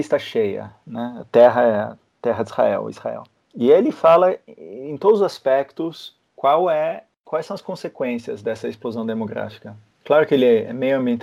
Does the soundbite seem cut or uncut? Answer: uncut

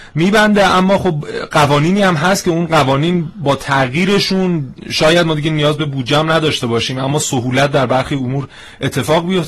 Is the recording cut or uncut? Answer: uncut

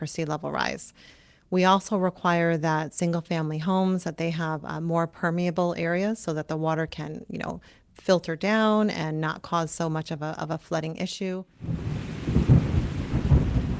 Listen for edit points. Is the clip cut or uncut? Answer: uncut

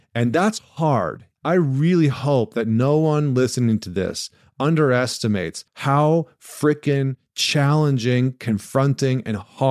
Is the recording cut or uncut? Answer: cut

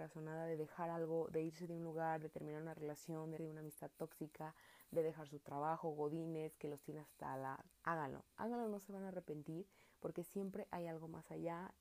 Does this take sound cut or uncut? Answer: cut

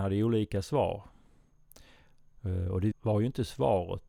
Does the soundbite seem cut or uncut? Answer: cut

